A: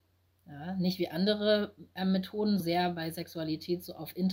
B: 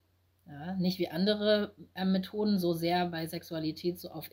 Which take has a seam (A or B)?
A